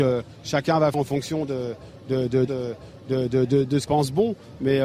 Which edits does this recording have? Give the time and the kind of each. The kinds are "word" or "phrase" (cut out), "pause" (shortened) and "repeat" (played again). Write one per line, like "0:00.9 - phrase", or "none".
0:00.9 - word
0:02.5 - repeat
0:03.9 - word